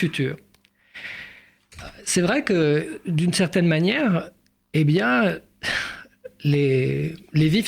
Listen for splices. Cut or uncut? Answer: uncut